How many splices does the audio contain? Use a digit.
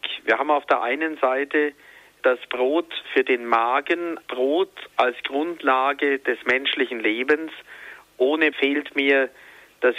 3